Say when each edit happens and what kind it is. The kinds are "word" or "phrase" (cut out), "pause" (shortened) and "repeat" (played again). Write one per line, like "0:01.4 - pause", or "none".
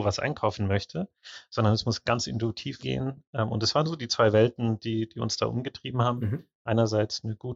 0:02.8 - phrase